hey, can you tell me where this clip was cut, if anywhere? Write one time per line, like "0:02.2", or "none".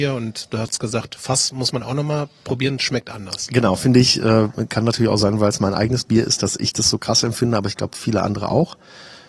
none